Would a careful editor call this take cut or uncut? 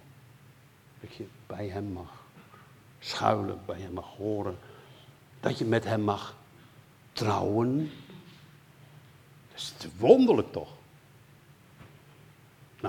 uncut